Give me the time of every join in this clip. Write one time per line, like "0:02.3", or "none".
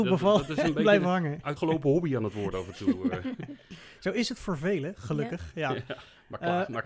0:01.6